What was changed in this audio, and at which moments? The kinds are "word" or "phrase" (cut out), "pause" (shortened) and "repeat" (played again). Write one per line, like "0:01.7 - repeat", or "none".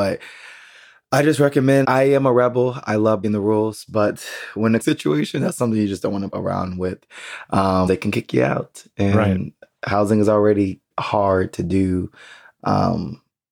0:01.8 - word
0:03.2 - word
0:04.8 - phrase
0:06.3 - word
0:07.9 - word
0:10.9 - pause